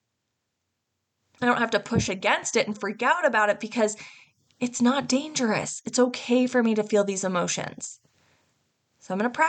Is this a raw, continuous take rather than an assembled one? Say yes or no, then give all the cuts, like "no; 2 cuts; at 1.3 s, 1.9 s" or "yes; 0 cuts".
yes; 0 cuts